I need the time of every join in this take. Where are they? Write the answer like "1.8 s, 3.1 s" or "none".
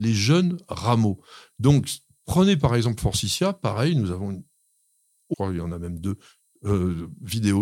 5.3 s